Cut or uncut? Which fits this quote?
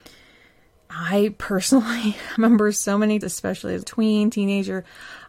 cut